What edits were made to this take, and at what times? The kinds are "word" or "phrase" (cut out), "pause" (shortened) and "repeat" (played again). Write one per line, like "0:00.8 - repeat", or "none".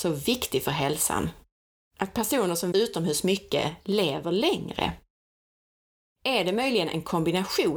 0:02.7 - word